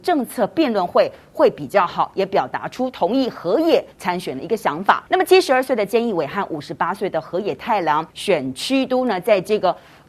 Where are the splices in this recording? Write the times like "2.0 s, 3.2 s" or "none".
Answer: 3.9 s, 5.1 s, 8.1 s